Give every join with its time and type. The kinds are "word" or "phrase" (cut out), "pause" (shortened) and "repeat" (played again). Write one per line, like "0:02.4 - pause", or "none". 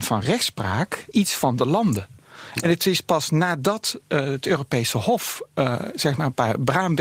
0:01.1 - word